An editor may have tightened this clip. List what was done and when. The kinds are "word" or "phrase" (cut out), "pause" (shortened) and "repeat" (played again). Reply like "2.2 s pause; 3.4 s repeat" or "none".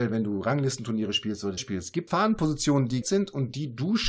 1.6 s word; 2.1 s word; 3.0 s word